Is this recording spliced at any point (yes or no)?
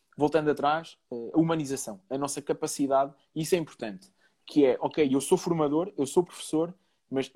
no